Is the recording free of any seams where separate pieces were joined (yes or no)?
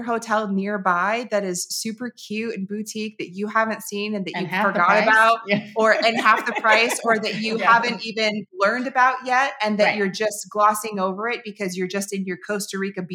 no